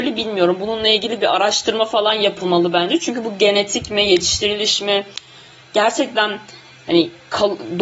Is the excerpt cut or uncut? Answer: uncut